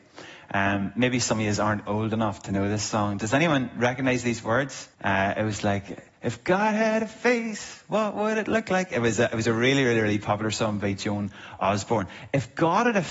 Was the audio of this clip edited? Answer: yes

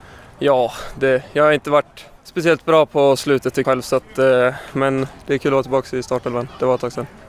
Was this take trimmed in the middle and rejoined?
yes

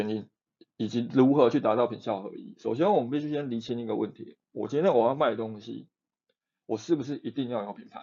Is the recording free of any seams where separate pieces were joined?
yes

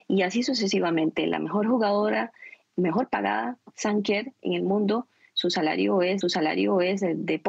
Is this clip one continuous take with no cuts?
no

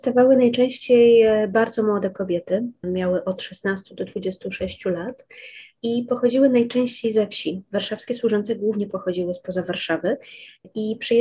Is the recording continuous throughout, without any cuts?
yes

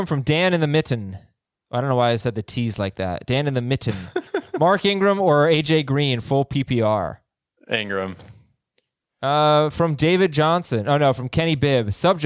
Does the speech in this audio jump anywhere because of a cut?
no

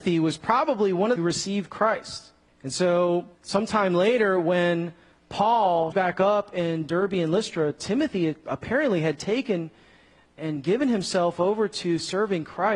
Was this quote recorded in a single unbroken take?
no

